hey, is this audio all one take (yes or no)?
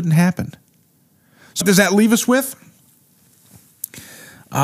no